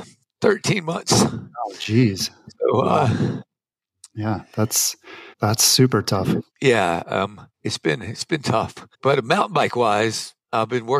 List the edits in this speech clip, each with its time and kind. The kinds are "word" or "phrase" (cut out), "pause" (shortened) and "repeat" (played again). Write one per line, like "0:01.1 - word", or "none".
0:02.5 - pause
0:05.3 - pause
0:06.5 - pause
0:07.5 - pause
0:08.9 - pause